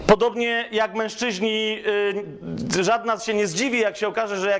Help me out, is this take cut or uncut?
cut